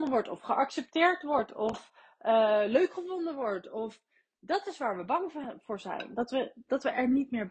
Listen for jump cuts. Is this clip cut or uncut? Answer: uncut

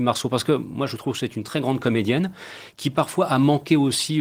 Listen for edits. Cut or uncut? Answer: uncut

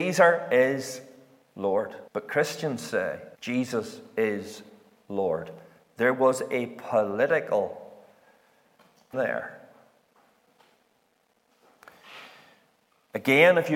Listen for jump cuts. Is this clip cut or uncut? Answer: cut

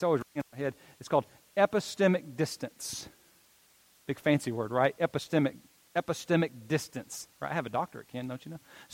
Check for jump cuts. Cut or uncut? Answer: uncut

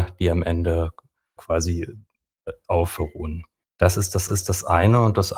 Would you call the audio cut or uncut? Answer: cut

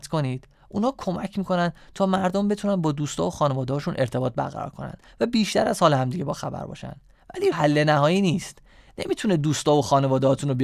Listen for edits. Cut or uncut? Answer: cut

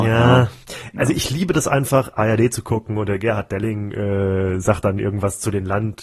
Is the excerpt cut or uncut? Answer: uncut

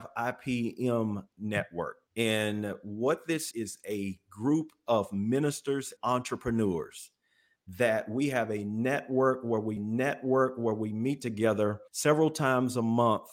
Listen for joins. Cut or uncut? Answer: cut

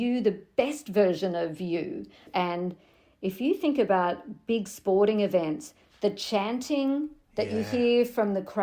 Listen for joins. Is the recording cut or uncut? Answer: uncut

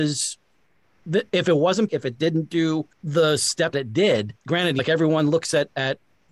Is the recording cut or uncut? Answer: cut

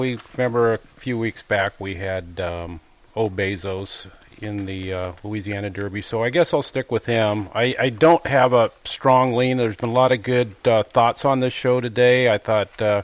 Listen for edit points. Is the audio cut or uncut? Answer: uncut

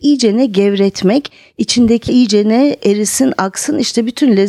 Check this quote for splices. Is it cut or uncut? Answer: cut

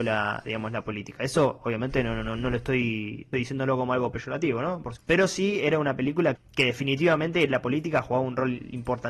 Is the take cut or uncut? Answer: cut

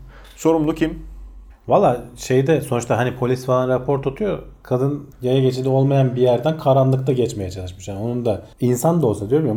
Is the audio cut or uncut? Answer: cut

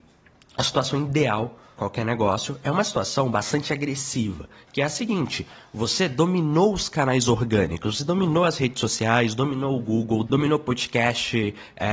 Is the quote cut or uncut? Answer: cut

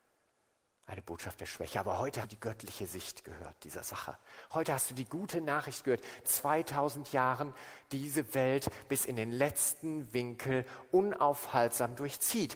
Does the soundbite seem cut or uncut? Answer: cut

